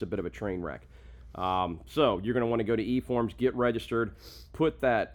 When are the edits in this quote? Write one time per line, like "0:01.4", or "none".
none